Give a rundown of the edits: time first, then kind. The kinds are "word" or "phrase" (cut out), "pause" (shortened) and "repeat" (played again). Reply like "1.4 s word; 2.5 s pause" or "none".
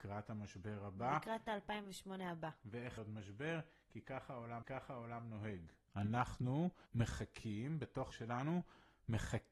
3.0 s phrase; 4.6 s repeat; 6.9 s pause; 8.1 s word